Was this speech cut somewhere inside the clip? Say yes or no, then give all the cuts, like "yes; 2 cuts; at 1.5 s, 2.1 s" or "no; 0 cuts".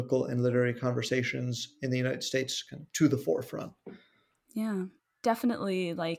yes; 1 cut; at 5.0 s